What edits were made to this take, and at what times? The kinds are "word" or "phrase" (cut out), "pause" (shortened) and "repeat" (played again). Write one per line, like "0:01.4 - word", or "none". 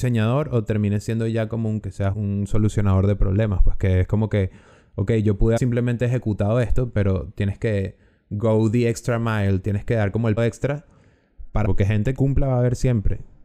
0:01.8 - word
0:02.1 - word
0:05.6 - word
0:10.4 - word
0:11.6 - word
0:12.1 - word